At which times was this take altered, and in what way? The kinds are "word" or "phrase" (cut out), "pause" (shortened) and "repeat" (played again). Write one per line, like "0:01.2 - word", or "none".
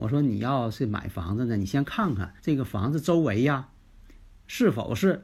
0:02.4 - pause